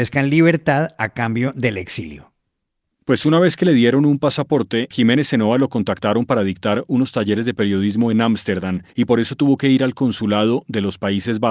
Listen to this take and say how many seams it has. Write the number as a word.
two